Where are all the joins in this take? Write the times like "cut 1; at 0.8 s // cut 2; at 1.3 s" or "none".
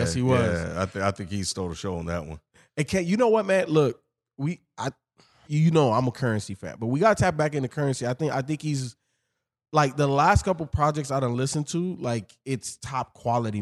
cut 1; at 5.5 s